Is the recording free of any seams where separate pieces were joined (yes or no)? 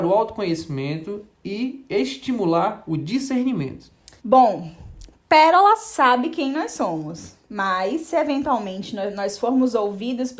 no